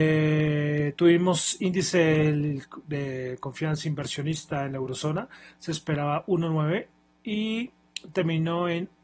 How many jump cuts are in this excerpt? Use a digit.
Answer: 0